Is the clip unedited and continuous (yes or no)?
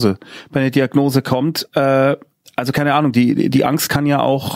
yes